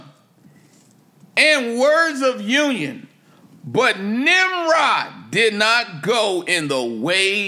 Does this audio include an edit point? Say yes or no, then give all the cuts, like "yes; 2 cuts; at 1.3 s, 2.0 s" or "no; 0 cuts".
no; 0 cuts